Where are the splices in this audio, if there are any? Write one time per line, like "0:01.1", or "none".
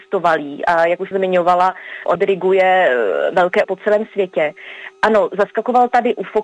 0:01.1
0:02.2
0:03.6